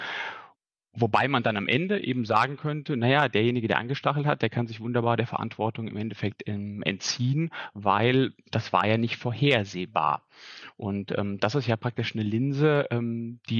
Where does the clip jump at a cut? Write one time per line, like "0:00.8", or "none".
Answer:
none

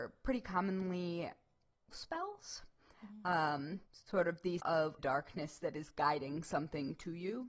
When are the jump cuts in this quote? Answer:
0:01.9
0:03.9
0:04.6
0:05.0

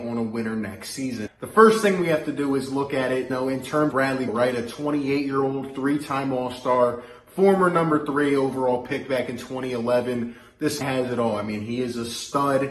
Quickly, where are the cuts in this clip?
0:01.3
0:03.3
0:03.9
0:04.3
0:10.8

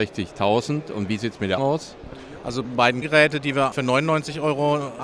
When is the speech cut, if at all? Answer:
0:01.6
0:02.6
0:03.0
0:03.7

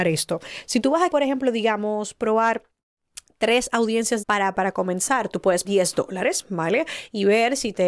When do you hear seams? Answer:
0:01.1
0:04.2
0:04.5
0:05.6

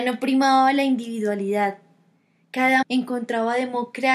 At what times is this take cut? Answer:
0:02.8

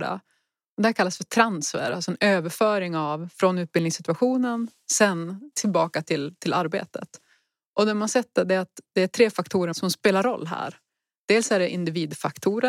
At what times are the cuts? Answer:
none

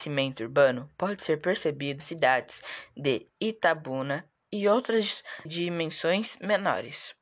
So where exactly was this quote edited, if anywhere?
0:02.0
0:03.3
0:05.4

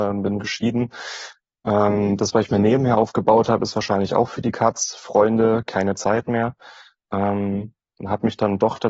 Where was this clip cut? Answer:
none

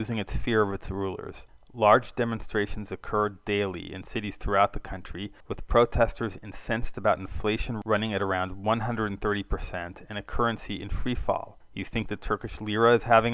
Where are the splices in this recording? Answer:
none

